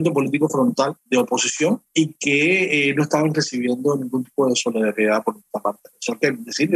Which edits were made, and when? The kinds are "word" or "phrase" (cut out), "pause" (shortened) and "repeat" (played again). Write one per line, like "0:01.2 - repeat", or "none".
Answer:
none